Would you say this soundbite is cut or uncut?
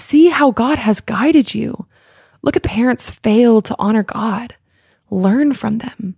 cut